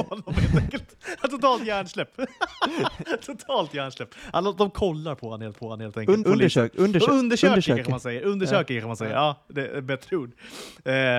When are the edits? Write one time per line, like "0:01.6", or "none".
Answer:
0:05.5
0:06.2